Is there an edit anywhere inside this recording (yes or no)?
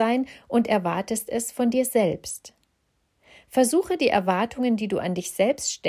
no